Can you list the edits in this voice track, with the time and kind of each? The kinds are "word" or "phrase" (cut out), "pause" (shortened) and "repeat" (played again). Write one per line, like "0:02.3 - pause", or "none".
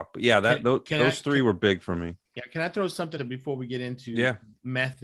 0:02.3 - pause
0:03.2 - word